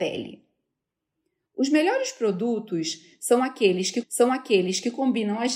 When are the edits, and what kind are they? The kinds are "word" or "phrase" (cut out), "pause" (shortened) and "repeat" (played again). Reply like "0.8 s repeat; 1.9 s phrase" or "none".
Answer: 4.0 s repeat